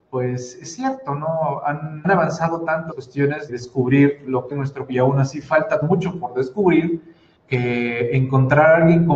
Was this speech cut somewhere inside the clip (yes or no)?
yes